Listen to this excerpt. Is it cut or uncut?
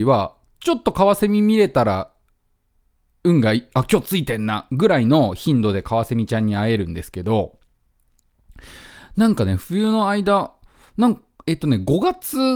uncut